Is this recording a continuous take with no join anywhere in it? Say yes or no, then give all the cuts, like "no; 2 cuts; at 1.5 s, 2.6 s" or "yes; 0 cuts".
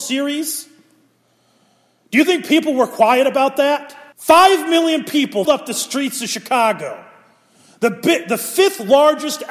no; 2 cuts; at 4.1 s, 5.4 s